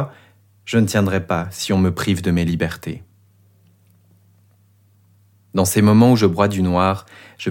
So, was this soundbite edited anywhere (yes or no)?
no